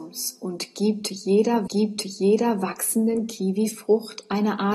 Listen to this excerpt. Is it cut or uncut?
cut